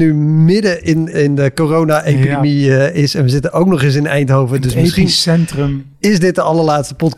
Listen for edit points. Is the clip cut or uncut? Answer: cut